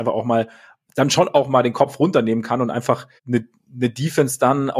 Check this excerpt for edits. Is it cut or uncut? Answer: cut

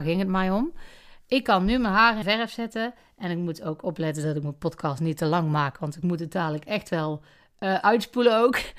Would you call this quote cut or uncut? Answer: cut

